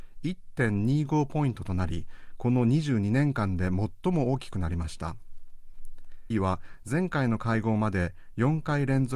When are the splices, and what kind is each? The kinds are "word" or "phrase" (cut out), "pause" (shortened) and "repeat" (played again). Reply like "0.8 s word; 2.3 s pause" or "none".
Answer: 6.3 s word